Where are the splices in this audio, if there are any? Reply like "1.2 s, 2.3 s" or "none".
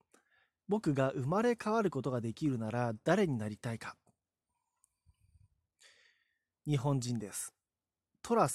none